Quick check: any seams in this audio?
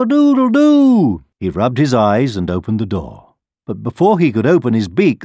yes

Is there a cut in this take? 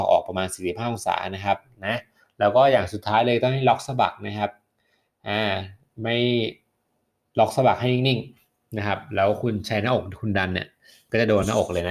no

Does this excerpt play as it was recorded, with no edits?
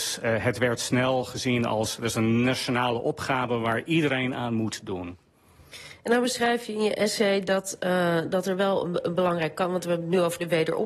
yes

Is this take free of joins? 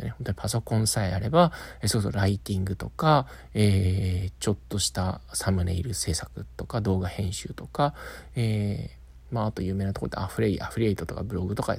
yes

